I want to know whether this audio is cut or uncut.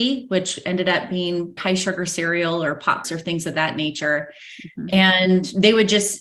cut